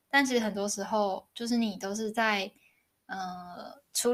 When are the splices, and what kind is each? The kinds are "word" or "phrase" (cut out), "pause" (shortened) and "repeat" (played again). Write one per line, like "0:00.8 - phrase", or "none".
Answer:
none